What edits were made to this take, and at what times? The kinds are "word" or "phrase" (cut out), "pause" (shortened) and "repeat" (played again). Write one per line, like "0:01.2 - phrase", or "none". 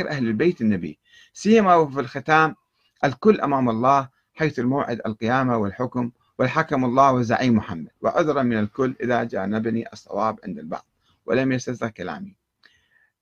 none